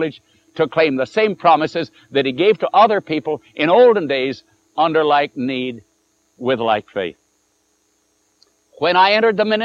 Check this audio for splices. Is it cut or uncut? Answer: uncut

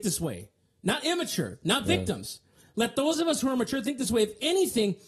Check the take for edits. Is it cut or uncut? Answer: uncut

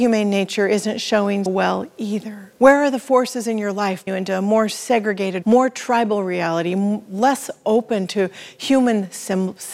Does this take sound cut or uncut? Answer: cut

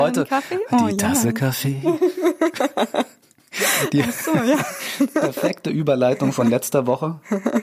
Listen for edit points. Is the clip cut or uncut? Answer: uncut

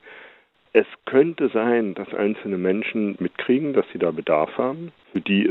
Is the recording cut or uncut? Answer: cut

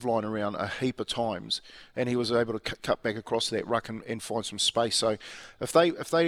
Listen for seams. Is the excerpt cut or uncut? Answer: uncut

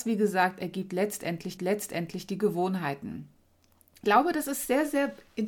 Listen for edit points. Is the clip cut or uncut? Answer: cut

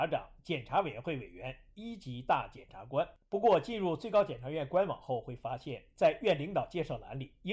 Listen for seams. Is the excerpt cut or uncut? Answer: uncut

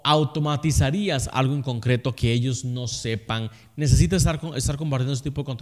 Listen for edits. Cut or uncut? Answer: uncut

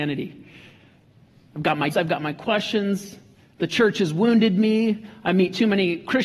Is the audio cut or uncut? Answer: cut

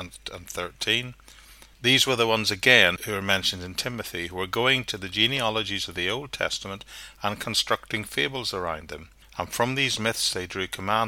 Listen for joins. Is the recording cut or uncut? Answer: cut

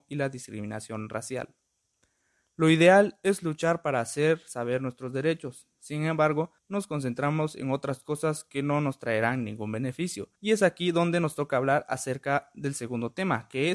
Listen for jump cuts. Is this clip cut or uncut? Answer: cut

